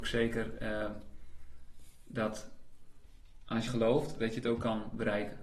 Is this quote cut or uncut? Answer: cut